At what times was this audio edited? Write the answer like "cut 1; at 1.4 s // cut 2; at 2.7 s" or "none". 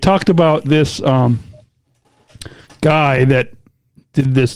none

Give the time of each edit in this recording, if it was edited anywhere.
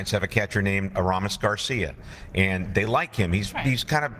none

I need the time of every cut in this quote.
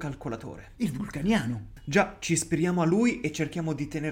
none

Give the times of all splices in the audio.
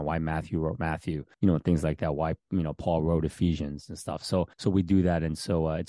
cut 1; at 1.3 s // cut 2; at 4.5 s

